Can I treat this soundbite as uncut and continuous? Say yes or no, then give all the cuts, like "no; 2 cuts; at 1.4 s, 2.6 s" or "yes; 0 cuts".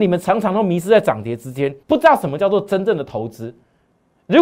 no; 1 cut; at 1.8 s